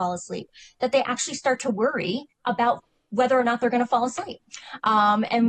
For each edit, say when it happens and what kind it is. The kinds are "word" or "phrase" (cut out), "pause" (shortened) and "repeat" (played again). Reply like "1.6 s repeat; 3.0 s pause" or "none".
2.3 s pause